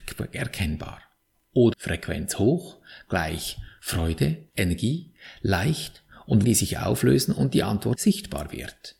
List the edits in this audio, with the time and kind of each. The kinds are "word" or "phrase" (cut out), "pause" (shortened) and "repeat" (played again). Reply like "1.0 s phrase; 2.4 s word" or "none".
1.7 s word; 4.5 s pause; 6.4 s word; 7.9 s word

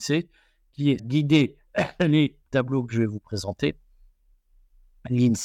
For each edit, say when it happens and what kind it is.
1.0 s phrase

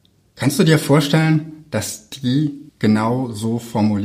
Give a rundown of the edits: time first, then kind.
2.7 s pause

